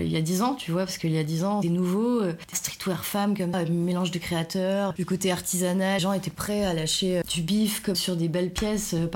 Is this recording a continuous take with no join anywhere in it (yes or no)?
no